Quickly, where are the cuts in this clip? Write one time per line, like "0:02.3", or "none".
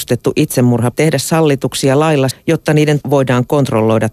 0:00.9
0:02.3
0:03.0